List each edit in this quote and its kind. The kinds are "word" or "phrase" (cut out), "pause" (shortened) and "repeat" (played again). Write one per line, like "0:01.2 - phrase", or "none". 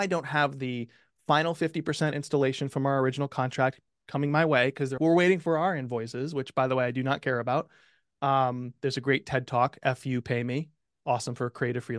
0:05.0 - word

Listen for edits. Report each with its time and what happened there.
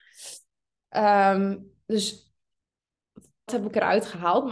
0:03.5 - word

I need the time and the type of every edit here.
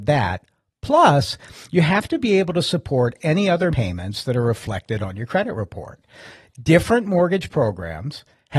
0:03.7 - word

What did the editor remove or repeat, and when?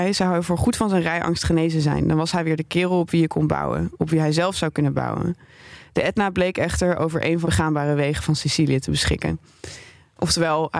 0:07.4 - phrase

